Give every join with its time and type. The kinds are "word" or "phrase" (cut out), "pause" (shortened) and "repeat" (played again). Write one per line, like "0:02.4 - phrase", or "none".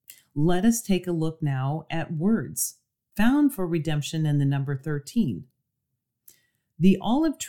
none

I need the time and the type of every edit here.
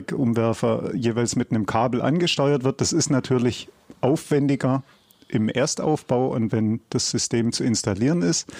none

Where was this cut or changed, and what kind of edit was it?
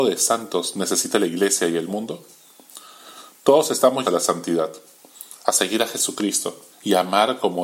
0:04.0 - word
0:06.7 - pause

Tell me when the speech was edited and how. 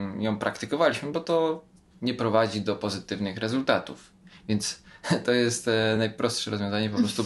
none

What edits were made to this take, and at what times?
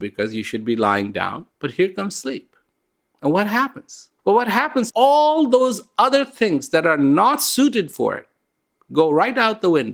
0:01.5 - pause
0:04.2 - pause
0:04.9 - word

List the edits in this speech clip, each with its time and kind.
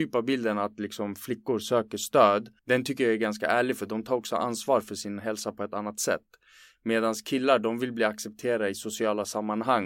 0:02.6 - pause

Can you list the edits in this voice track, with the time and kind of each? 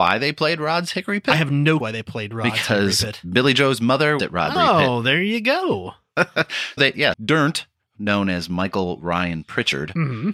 0:01.8 - word
0:04.2 - phrase
0:04.6 - word
0:06.8 - word
0:07.1 - word
0:07.9 - word

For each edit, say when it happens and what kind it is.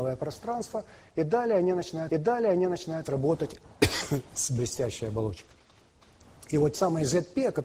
0:02.1 - repeat
0:06.7 - word

